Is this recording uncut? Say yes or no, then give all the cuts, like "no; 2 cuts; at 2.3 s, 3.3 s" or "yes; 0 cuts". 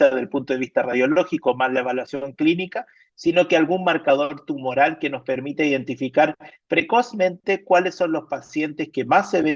yes; 0 cuts